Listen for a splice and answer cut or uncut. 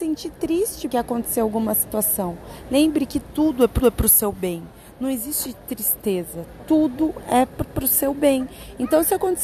cut